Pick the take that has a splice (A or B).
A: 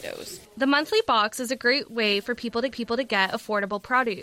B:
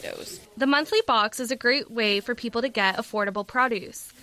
A